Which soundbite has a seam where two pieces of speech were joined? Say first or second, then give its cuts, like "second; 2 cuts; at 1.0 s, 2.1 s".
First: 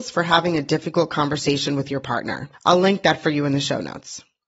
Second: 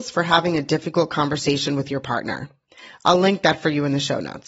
first; 1 cut; at 2.5 s